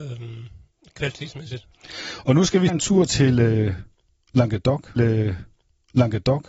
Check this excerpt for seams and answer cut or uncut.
cut